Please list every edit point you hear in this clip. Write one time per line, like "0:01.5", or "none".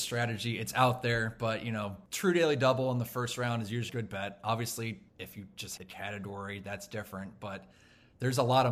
0:03.9
0:05.1
0:05.8